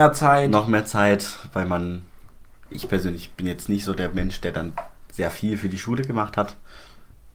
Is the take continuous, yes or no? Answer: no